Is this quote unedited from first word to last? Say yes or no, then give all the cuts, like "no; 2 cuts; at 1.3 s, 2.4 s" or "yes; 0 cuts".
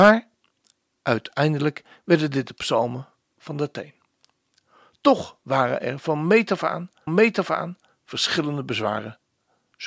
no; 1 cut; at 7.1 s